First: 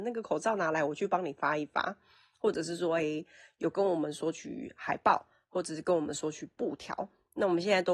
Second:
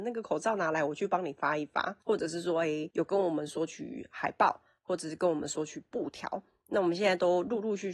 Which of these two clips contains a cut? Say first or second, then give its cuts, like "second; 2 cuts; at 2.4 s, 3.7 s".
second; 2 cuts; at 2.0 s, 2.9 s